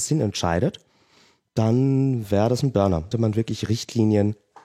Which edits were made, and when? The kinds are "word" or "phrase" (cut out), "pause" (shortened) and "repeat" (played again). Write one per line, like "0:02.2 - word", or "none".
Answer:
0:03.1 - phrase

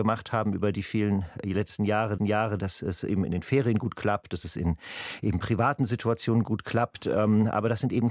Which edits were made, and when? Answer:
0:02.2 - repeat

